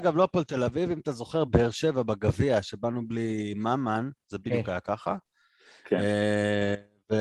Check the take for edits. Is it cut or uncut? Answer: uncut